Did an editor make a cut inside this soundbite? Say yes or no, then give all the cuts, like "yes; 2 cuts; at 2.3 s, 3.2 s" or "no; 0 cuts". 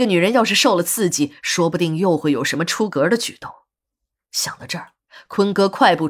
no; 0 cuts